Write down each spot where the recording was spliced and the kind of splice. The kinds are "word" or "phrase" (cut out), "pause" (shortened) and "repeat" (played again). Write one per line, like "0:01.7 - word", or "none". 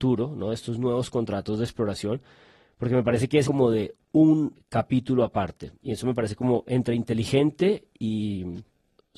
0:03.4 - phrase